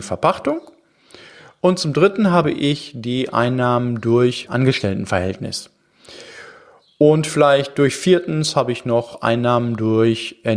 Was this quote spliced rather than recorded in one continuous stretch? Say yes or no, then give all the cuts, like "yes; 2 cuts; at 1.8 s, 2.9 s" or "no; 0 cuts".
yes; 1 cut; at 4.5 s